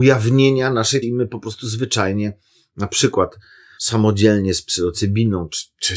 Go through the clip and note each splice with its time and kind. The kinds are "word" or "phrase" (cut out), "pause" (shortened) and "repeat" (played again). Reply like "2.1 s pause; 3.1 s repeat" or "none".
1.0 s word; 3.8 s word